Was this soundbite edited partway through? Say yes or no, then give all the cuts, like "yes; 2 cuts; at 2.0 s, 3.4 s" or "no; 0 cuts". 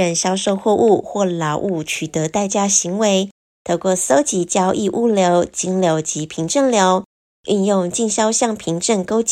no; 0 cuts